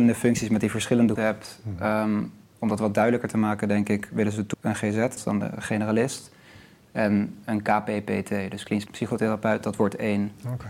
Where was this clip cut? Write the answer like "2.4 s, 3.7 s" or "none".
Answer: 1.2 s, 4.5 s, 5.2 s, 8.9 s